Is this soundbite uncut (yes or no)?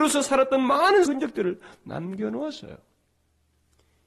no